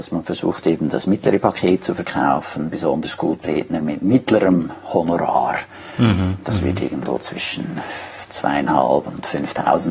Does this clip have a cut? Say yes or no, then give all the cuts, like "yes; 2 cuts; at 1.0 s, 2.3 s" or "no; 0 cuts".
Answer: yes; 1 cut; at 3.4 s